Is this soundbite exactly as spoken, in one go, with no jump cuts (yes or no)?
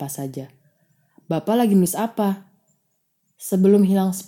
yes